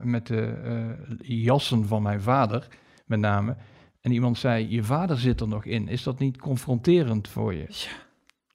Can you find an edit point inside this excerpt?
no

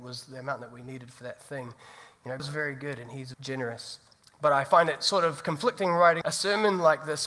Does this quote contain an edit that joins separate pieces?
yes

